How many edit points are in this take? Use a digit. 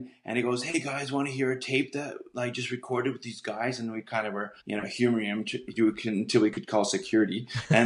1